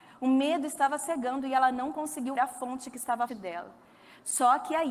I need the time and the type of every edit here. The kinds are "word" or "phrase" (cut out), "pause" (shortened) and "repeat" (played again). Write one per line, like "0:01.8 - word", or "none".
0:02.3 - word
0:03.3 - word